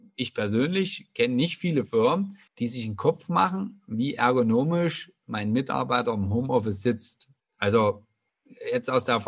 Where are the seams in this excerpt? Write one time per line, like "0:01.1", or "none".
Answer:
0:02.5
0:07.4